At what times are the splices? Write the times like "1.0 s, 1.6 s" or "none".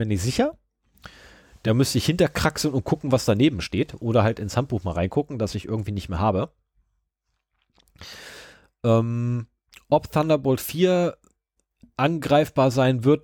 none